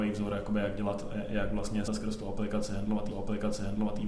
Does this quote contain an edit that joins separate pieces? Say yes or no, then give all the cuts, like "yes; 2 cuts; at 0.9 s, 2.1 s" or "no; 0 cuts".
yes; 2 cuts; at 1.9 s, 3.1 s